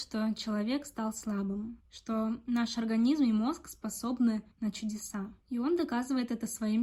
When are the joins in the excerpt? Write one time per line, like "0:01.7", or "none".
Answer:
0:01.8
0:04.5
0:05.4